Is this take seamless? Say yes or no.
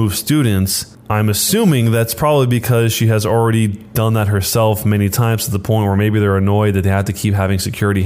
yes